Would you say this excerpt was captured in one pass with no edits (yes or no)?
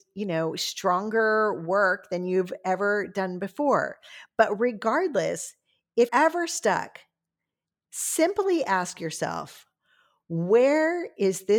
no